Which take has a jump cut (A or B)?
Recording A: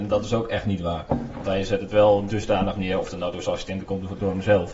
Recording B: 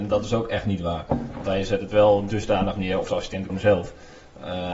B